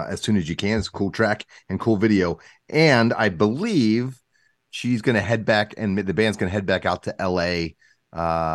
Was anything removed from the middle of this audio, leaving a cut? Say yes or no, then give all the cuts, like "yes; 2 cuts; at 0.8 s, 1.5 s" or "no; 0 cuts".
no; 0 cuts